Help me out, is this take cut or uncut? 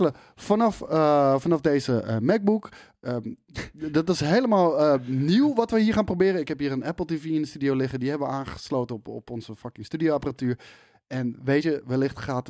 uncut